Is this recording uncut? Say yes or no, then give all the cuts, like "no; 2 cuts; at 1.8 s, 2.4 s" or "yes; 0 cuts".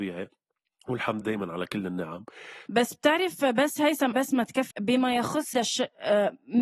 no; 5 cuts; at 1.2 s, 2.7 s, 4.1 s, 4.7 s, 5.5 s